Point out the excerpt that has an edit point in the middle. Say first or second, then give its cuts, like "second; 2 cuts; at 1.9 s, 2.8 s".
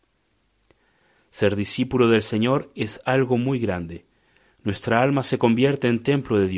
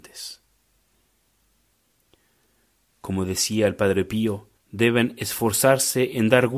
second; 1 cut; at 4.6 s